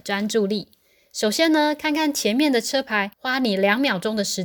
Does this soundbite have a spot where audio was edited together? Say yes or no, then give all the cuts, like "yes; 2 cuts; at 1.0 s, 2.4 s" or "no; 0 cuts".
yes; 1 cut; at 3.1 s